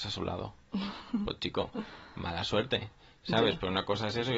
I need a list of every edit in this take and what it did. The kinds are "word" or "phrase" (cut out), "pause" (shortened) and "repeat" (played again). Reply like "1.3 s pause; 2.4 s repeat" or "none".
none